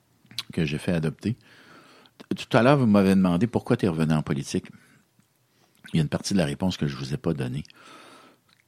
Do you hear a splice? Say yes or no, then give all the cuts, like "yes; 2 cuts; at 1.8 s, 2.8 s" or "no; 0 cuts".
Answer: no; 0 cuts